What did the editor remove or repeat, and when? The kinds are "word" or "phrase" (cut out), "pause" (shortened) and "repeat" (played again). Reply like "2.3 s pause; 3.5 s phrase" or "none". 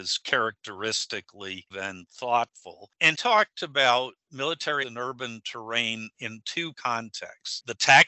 1.7 s word; 3.1 s word; 4.8 s word; 6.7 s word